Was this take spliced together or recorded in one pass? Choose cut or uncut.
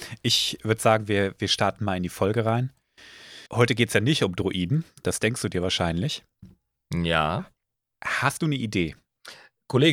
cut